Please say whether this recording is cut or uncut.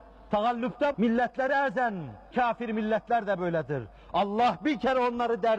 cut